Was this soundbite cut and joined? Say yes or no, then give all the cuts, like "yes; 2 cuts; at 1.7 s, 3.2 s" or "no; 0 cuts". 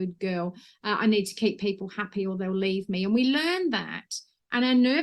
no; 0 cuts